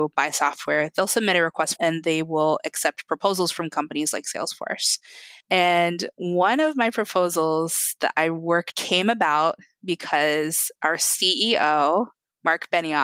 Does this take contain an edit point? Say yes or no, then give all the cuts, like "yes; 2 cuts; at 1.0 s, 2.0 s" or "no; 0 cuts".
yes; 3 cuts; at 1.8 s, 5.4 s, 8.7 s